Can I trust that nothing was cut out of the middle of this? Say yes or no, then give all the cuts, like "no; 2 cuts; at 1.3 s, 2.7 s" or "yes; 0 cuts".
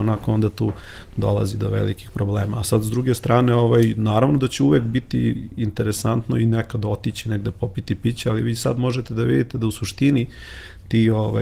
yes; 0 cuts